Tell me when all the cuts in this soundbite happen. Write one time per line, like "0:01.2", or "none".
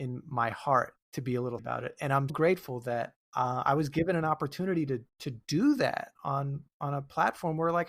0:01.0
0:01.6
0:02.3
0:03.2
0:05.1
0:06.1

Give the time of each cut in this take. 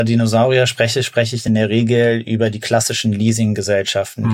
none

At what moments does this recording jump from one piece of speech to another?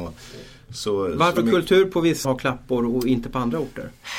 0:01.4
0:02.2

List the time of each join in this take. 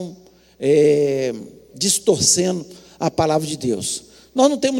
0:01.7

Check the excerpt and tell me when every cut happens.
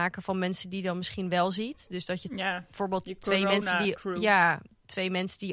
none

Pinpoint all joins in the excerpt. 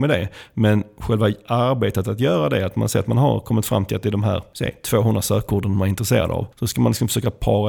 none

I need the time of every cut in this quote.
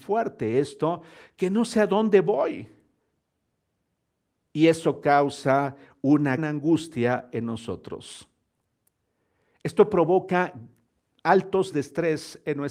0:06.4
0:11.7

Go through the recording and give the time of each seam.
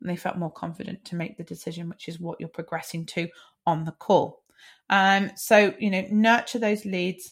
none

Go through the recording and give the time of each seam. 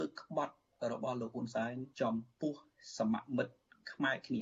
0:01.9

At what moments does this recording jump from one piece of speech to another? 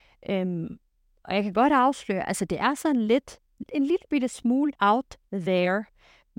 0:04.8

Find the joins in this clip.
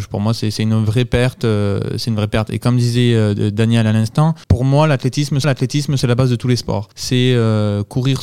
0:04.4
0:05.4
0:06.9

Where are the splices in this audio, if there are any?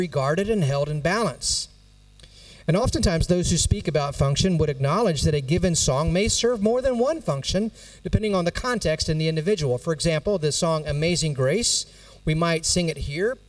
none

